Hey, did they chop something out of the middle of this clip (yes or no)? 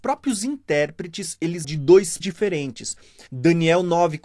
yes